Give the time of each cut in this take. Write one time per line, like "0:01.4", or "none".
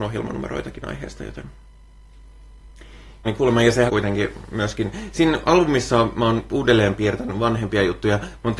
0:03.2
0:03.9